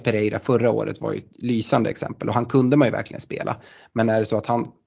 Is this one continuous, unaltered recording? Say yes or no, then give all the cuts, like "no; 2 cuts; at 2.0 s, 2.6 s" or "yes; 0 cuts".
yes; 0 cuts